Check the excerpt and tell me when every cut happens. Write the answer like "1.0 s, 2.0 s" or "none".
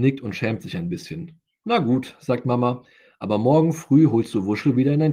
none